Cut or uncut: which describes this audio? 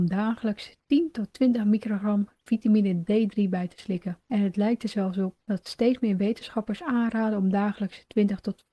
cut